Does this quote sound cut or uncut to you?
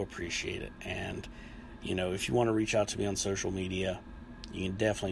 uncut